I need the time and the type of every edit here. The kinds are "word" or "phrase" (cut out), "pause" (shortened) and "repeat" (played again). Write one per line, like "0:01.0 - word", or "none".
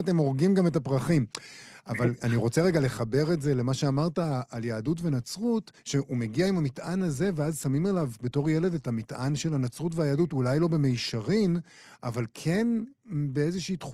0:05.8 - pause